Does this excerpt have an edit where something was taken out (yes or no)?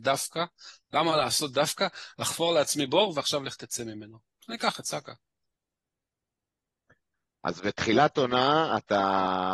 no